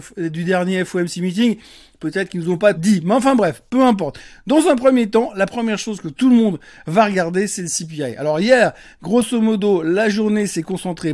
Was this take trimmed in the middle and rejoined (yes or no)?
yes